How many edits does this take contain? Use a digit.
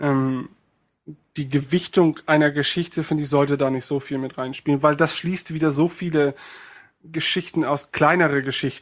0